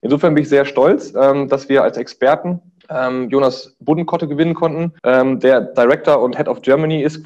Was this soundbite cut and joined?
yes; 2 cuts; at 2.8 s, 5.0 s

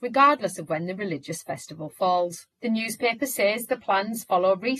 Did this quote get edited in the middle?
yes; 1 cut; at 2.5 s

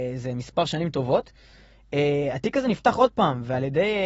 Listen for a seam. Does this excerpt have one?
no; 0 cuts

